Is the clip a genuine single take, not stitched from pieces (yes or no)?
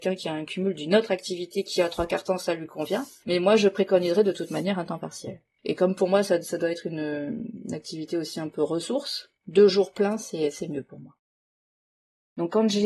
no